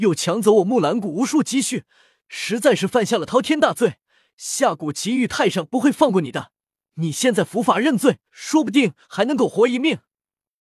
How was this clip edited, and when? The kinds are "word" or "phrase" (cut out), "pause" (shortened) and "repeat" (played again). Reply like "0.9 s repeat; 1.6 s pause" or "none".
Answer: 8.3 s pause